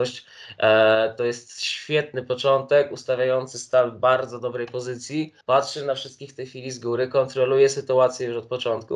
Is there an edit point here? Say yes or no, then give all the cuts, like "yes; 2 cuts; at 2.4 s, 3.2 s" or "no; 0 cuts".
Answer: yes; 1 cut; at 5.4 s